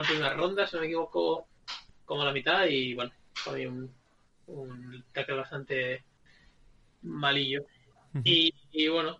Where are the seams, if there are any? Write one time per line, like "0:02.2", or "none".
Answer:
none